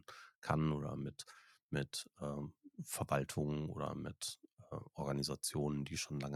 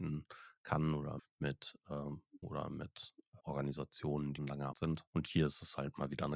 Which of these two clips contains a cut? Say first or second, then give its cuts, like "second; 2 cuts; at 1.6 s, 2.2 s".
second; 6 cuts; at 1.2 s, 2.4 s, 3.4 s, 4.4 s, 4.7 s, 5.1 s